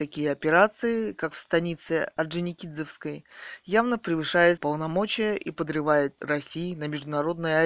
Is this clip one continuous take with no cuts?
no; 2 cuts; at 4.6 s, 6.2 s

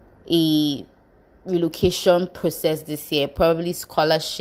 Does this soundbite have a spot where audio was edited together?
no; 0 cuts

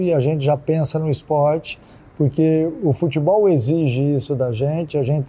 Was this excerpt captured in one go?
yes; 0 cuts

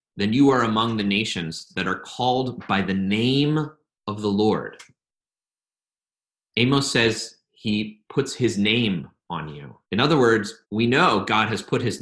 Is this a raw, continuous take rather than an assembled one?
no; 2 cuts; at 9.8 s, 10.6 s

